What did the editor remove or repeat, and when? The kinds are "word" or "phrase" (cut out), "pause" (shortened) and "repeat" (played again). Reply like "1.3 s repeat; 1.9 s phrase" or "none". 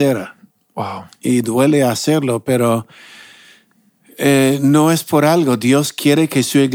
none